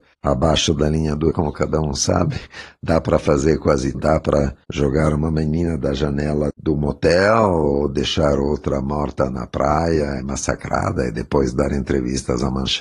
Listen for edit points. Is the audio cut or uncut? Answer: cut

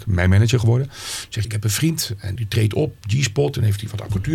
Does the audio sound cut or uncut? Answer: cut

